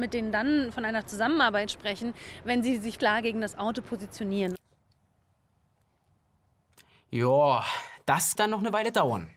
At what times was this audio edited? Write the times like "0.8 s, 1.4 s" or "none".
3.0 s, 8.4 s